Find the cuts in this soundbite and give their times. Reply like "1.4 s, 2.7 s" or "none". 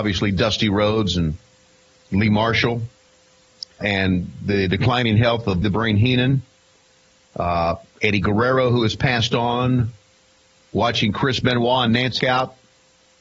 3.8 s, 5.6 s, 12.2 s